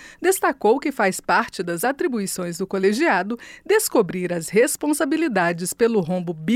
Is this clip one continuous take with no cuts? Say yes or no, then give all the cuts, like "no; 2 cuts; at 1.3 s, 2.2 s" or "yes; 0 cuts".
yes; 0 cuts